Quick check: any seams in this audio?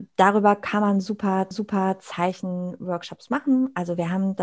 yes; 1 cut; at 1.5 s

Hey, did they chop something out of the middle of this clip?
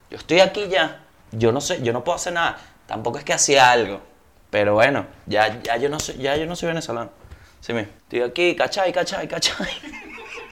yes; 3 cuts; at 1.1 s, 4.3 s, 8.0 s

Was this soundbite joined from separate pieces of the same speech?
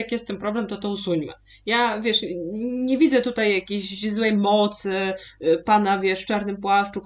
no; 0 cuts

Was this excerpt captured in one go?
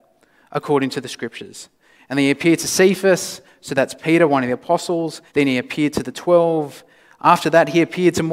no; 1 cut; at 5.3 s

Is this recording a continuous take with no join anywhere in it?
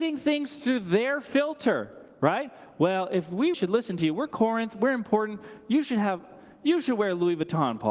no; 1 cut; at 3.5 s

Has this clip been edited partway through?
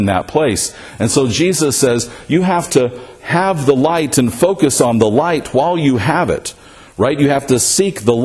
no; 0 cuts

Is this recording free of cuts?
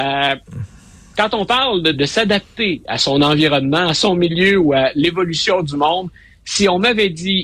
no; 1 cut; at 1.9 s

